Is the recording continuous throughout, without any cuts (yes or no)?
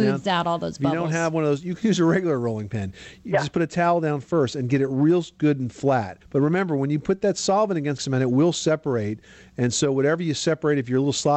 no